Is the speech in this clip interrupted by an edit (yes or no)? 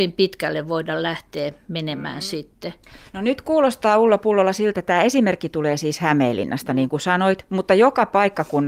yes